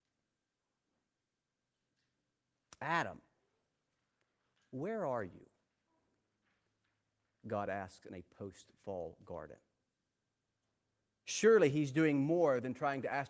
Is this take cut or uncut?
uncut